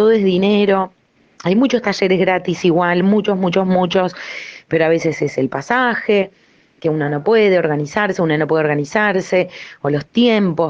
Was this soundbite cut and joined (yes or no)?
no